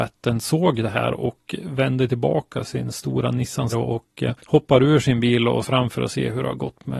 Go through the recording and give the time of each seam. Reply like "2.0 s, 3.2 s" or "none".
3.7 s, 4.4 s, 5.6 s